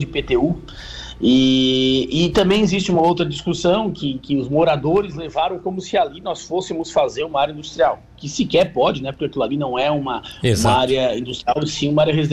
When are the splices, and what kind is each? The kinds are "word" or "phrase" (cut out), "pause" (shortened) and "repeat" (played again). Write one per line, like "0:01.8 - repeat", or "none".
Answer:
none